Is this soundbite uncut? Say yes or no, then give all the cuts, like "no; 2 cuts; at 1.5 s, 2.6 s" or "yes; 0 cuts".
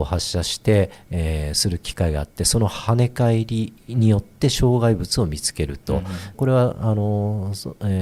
no; 1 cut; at 6.3 s